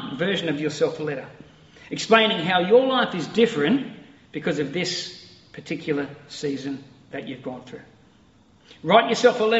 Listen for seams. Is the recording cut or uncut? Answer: uncut